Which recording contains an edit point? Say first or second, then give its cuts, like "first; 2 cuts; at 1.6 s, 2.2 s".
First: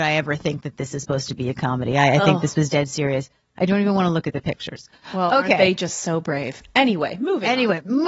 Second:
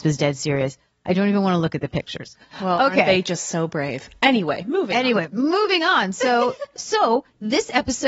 second; 1 cut; at 6.8 s